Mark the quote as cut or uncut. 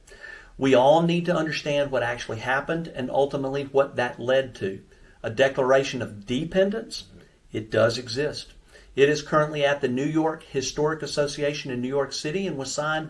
uncut